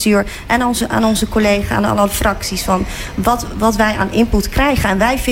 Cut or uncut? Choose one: uncut